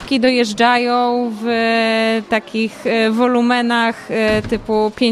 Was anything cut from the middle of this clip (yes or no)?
no